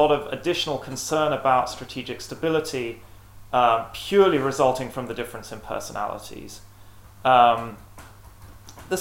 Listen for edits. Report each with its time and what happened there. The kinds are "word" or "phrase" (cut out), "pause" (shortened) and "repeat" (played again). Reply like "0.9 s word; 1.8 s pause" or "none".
none